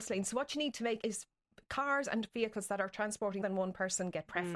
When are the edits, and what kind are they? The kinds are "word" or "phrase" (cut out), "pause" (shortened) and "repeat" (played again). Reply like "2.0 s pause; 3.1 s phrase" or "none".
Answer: 1.0 s word; 3.4 s word